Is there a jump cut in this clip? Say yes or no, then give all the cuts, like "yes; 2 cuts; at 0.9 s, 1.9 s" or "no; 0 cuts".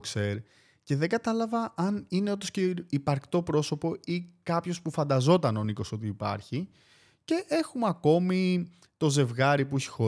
no; 0 cuts